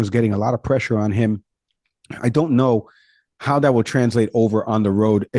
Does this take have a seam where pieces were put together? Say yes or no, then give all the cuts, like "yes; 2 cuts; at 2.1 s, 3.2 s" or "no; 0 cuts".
no; 0 cuts